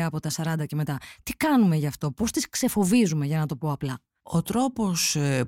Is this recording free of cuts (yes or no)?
yes